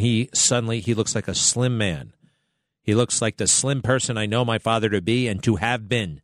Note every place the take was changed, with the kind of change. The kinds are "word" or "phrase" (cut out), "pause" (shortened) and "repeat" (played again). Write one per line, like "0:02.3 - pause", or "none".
none